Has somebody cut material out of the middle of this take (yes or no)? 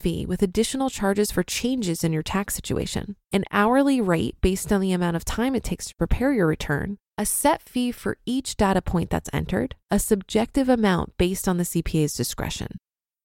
yes